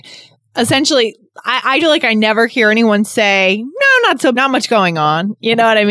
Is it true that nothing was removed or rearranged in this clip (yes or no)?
no